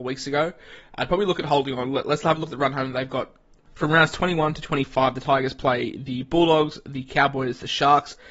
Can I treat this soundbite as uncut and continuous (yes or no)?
yes